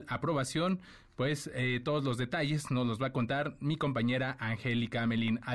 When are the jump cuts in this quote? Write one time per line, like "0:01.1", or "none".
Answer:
none